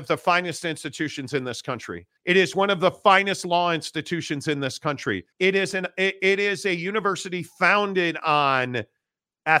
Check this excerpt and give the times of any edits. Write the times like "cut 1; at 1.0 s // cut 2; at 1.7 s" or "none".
cut 1; at 2.2 s // cut 2; at 5.3 s